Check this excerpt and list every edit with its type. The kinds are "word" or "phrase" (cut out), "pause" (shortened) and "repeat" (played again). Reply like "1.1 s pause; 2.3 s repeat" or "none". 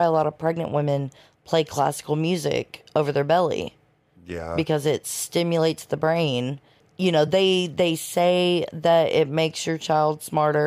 none